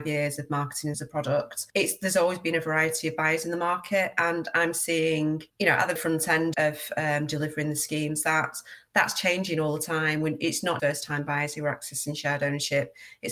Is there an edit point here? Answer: yes; 5 cuts; at 0.9 s, 5.5 s, 6.0 s, 6.5 s, 10.8 s

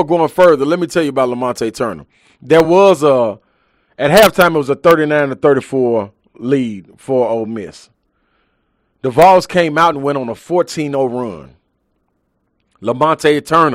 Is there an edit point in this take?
no; 0 cuts

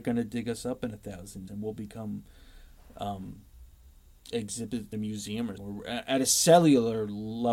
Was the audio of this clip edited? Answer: yes; 3 cuts; at 1.5 s, 4.9 s, 5.6 s

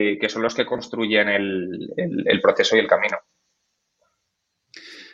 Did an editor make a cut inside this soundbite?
no; 0 cuts

